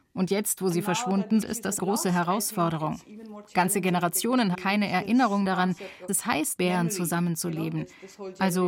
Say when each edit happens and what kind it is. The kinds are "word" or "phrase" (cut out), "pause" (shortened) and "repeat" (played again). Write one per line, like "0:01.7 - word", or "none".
0:01.4 - word
0:01.8 - word
0:04.5 - word
0:05.4 - word
0:06.1 - word
0:06.6 - word